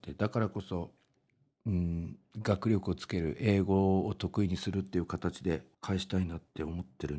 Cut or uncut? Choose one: cut